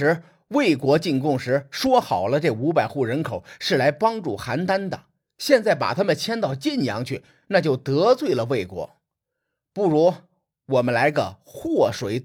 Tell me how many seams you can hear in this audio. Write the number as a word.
zero